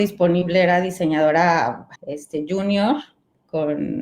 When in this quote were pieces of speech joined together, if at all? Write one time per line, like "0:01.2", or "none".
0:02.0